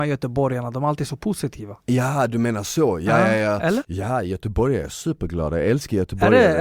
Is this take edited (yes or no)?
no